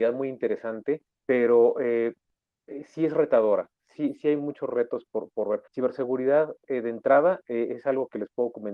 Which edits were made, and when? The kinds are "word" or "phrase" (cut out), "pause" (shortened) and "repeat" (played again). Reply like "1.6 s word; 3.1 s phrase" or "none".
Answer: 1.1 s pause; 5.7 s pause